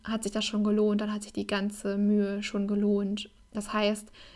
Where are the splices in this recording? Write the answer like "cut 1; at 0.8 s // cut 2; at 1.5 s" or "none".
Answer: none